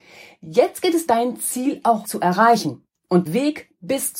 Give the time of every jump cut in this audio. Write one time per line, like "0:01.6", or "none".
0:01.1
0:02.0
0:03.3